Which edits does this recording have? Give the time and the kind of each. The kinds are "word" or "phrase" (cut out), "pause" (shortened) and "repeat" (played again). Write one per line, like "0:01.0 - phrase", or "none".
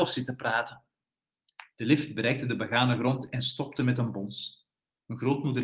none